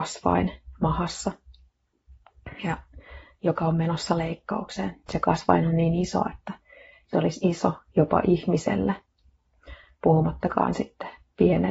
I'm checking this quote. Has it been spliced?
no; 0 cuts

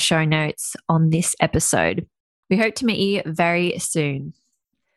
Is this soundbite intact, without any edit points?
yes; 0 cuts

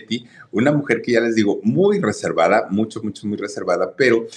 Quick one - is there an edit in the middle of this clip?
no; 0 cuts

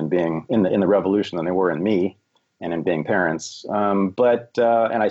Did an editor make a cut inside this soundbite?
no; 0 cuts

